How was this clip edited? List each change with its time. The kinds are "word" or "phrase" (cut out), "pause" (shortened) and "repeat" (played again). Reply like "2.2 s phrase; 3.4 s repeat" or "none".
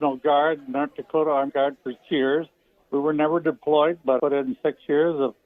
1.5 s word; 2.0 s word; 4.2 s word